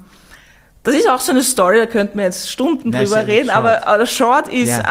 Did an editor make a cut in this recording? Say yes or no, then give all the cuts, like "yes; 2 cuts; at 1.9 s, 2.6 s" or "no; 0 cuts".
no; 0 cuts